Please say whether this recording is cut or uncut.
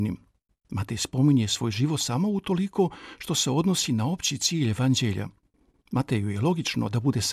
uncut